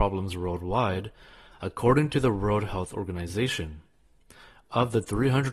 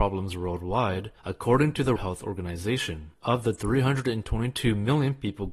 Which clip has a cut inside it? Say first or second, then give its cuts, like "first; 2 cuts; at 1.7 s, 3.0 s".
second; 3 cuts; at 1.2 s, 2.0 s, 3.1 s